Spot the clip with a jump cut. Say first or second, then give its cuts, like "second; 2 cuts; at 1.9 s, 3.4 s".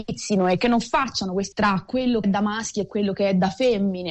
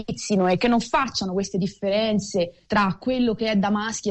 first; 2 cuts; at 1.5 s, 2.2 s